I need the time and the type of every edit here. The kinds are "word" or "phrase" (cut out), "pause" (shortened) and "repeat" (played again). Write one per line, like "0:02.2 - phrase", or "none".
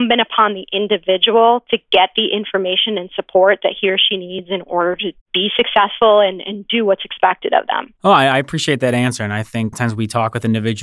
0:05.2 - pause
0:08.0 - pause
0:09.7 - phrase